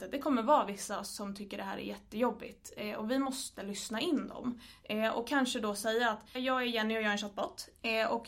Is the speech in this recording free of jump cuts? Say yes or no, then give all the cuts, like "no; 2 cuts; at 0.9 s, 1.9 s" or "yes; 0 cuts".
no; 1 cut; at 6.4 s